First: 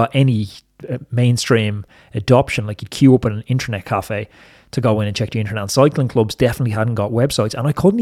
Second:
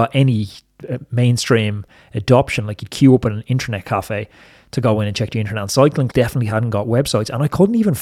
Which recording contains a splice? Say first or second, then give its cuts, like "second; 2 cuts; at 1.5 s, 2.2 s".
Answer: second; 1 cut; at 6.1 s